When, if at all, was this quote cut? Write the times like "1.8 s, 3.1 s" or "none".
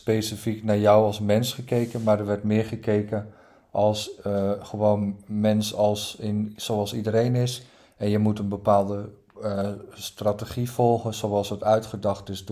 none

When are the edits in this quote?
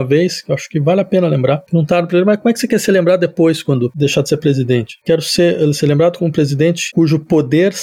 none

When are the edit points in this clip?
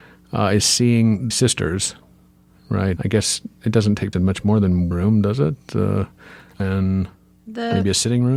1.3 s, 3.0 s, 4.1 s, 4.9 s, 6.6 s

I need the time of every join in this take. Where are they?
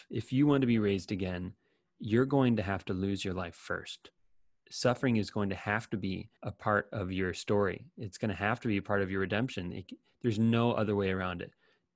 6.4 s

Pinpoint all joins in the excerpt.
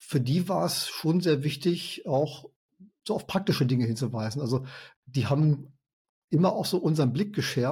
none

